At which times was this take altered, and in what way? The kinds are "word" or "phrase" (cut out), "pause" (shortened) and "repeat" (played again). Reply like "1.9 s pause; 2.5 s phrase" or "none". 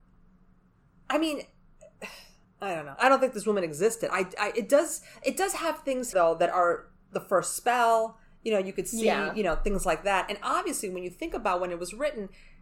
2.4 s pause; 6.1 s word